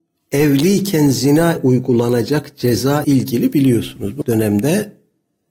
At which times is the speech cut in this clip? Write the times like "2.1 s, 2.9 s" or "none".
1.6 s, 3.0 s, 4.2 s